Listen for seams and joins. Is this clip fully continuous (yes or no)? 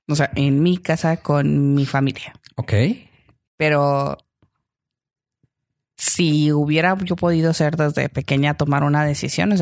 yes